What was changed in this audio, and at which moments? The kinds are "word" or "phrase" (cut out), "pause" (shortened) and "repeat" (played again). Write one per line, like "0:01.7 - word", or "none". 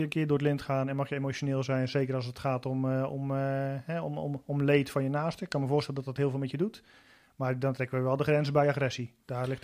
none

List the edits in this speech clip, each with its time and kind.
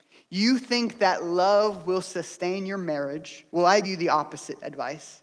0:03.5 - pause
0:03.8 - word

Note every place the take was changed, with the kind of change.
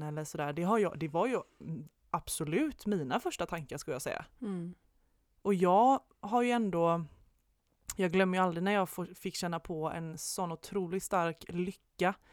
none

